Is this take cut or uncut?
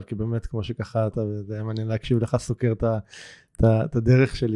cut